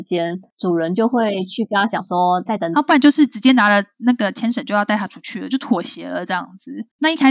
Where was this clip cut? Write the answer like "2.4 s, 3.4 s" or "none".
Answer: 2.5 s